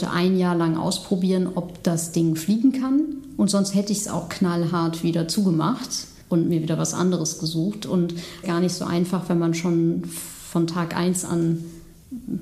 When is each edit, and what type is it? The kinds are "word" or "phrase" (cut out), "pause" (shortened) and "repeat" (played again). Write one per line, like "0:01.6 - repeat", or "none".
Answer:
0:06.2 - pause
0:08.4 - phrase